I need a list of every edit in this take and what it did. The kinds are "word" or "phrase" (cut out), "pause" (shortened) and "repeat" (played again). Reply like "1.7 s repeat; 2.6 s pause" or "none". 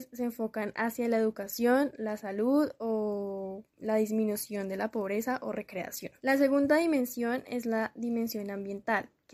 3.7 s pause; 6.2 s pause